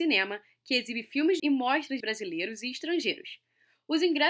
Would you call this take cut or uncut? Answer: cut